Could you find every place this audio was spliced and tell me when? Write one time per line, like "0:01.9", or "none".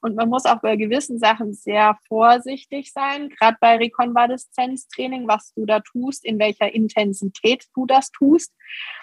none